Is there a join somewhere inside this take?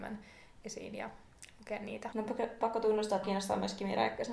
yes; 2 cuts; at 2.6 s, 3.2 s

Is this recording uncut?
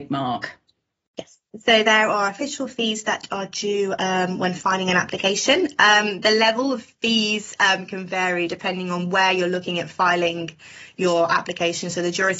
yes; 0 cuts

